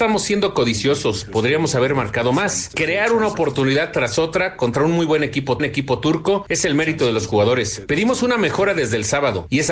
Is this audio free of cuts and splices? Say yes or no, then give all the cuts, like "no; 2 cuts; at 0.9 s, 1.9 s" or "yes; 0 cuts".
no; 1 cut; at 5.6 s